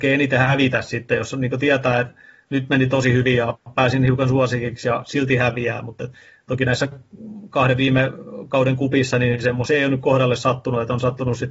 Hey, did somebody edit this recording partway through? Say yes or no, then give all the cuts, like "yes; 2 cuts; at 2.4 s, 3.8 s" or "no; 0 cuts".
no; 0 cuts